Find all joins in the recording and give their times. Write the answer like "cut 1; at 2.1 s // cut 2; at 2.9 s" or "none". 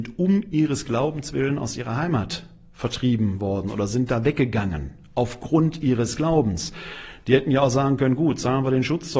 none